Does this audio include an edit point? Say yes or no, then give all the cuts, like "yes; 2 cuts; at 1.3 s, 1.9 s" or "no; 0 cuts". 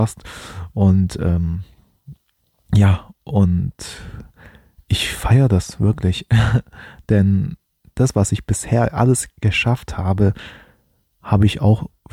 no; 0 cuts